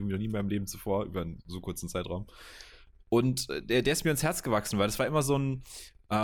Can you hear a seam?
no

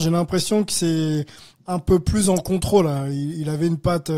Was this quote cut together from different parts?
no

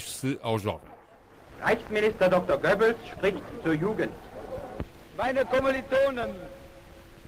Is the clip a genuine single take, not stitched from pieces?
yes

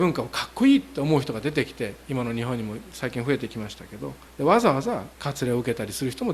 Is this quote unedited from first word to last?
no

